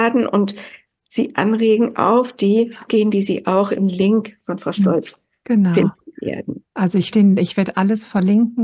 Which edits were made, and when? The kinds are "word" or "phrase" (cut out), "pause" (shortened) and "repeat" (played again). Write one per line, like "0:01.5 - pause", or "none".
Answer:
0:02.9 - phrase
0:06.7 - pause
0:07.1 - word